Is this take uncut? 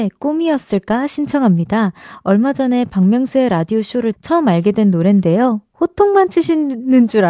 no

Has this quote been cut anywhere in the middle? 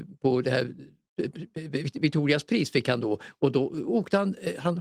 no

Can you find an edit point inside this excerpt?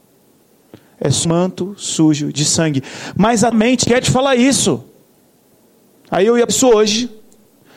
yes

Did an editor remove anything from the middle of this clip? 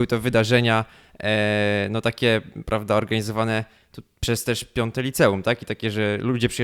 no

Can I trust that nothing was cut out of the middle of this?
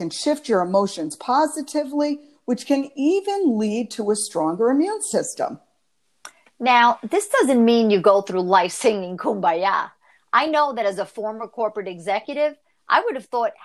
yes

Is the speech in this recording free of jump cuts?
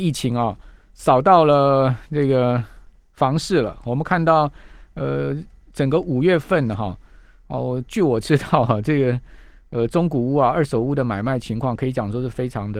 yes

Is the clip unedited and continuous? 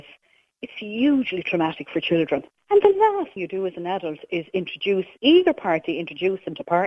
no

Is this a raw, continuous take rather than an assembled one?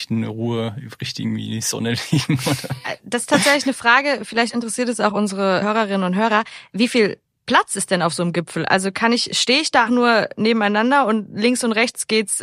no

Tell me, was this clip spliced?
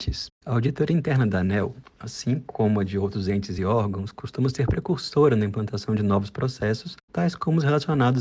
no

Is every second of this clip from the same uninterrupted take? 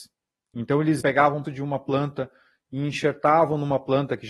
no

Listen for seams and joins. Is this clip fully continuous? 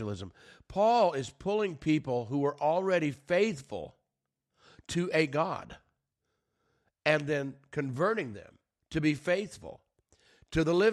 yes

